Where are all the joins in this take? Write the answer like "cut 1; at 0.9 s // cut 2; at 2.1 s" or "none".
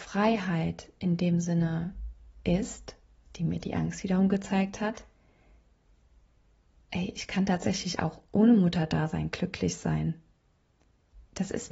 none